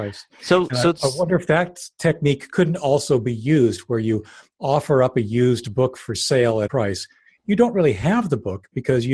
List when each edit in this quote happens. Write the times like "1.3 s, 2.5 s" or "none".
6.7 s